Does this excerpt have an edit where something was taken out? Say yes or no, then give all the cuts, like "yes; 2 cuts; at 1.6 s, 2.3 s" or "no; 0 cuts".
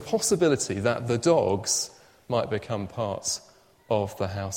no; 0 cuts